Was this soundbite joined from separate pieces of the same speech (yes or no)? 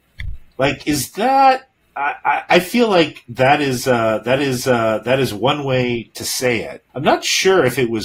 yes